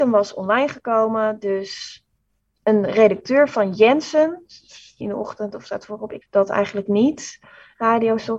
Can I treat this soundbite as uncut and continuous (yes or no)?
no